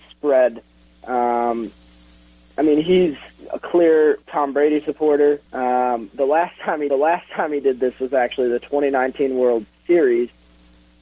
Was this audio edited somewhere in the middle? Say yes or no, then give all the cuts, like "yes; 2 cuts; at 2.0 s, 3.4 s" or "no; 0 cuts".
yes; 3 cuts; at 4.2 s, 5.5 s, 6.9 s